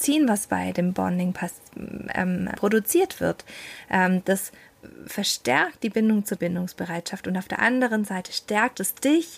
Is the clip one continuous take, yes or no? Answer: no